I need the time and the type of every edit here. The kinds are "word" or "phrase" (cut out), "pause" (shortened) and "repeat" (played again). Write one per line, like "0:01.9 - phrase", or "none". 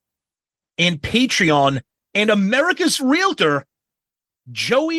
0:03.0 - word